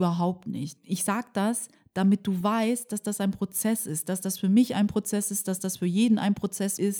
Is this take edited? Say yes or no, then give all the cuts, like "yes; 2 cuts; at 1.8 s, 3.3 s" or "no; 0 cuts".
no; 0 cuts